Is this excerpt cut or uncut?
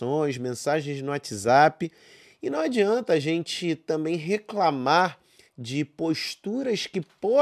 uncut